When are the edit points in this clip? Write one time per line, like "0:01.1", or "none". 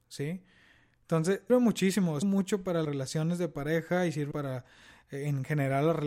0:01.5
0:02.2
0:02.8
0:04.3